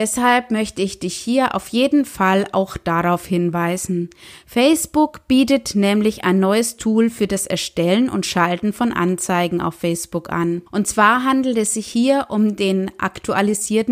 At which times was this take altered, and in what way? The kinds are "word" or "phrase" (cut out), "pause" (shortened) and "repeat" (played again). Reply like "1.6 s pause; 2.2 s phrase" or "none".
10.7 s pause